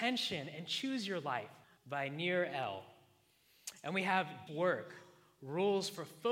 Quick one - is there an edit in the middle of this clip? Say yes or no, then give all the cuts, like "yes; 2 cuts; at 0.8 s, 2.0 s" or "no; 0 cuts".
yes; 2 cuts; at 1.6 s, 4.5 s